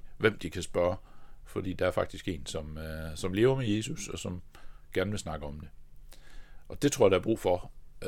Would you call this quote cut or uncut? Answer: uncut